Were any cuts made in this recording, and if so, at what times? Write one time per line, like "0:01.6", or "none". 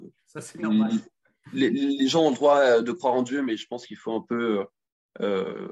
none